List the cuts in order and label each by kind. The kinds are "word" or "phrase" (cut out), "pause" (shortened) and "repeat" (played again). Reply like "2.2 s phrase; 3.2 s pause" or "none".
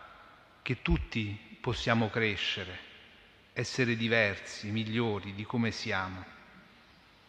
none